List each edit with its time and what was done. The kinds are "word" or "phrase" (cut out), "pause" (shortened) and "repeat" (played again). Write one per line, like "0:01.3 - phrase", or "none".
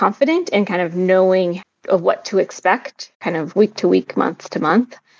0:03.1 - pause